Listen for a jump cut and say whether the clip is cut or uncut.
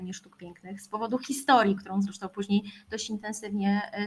uncut